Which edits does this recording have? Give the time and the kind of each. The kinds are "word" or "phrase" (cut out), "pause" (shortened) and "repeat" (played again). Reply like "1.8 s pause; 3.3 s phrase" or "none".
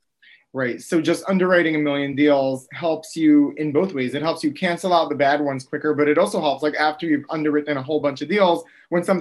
none